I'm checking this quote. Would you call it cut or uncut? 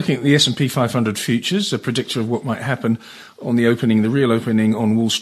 uncut